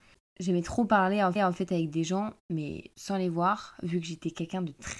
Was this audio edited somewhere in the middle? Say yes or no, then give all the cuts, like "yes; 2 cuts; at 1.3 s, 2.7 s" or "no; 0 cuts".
yes; 1 cut; at 1.4 s